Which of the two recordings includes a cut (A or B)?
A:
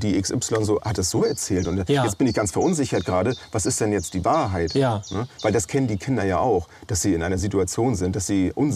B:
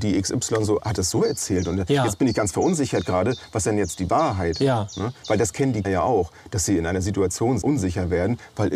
B